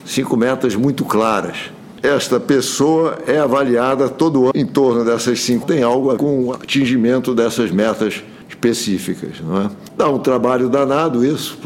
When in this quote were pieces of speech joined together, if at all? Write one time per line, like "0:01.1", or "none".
0:04.5
0:05.6
0:06.2